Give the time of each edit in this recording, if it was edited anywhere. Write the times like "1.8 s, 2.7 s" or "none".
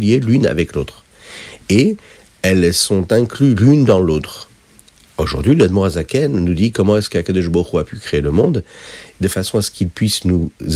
none